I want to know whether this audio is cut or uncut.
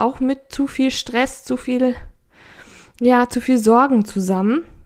uncut